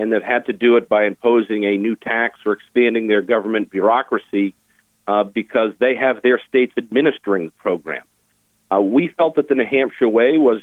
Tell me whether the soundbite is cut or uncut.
uncut